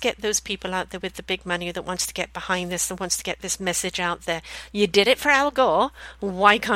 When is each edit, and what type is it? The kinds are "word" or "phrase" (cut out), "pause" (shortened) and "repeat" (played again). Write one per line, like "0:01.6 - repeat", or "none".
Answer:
none